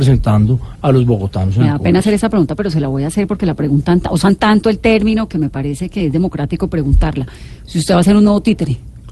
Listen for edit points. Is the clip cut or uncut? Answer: uncut